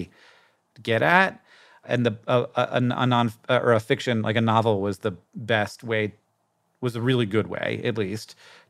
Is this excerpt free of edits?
yes; 0 cuts

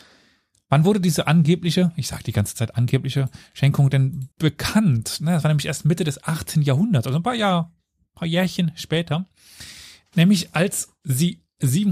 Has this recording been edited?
yes; 1 cut; at 4.3 s

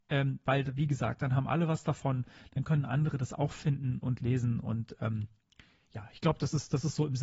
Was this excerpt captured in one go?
no; 1 cut; at 4.0 s

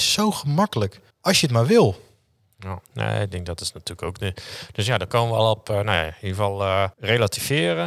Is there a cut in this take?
yes; 3 cuts; at 1.1 s, 2.8 s, 6.9 s

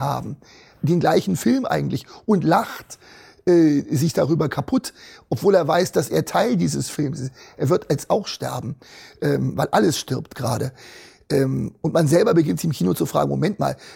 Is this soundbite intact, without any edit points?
yes; 0 cuts

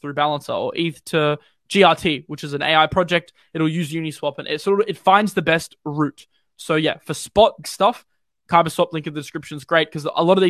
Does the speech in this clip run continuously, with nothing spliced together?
no; 1 cut; at 7.6 s

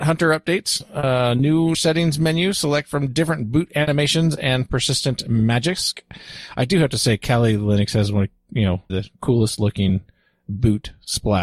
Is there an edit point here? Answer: yes; 2 cuts; at 1.7 s, 8.9 s

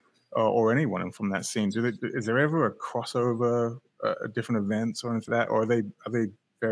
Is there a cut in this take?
yes; 1 cut; at 5.3 s

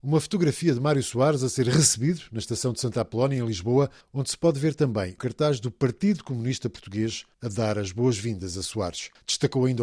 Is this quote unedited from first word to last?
no; 1 cut; at 5.2 s

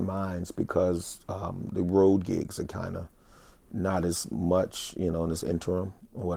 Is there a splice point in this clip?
no; 0 cuts

